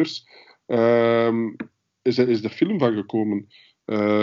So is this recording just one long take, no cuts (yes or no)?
yes